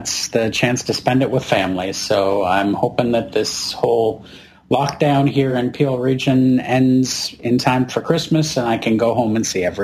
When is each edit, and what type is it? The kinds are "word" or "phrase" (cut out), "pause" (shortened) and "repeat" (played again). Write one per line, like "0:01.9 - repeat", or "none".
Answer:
none